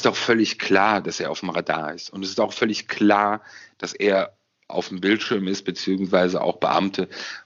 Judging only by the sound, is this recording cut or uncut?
uncut